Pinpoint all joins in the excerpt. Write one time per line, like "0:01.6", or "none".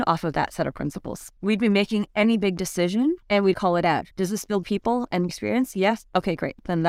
0:01.4
0:03.2
0:03.5
0:04.1
0:04.6
0:05.3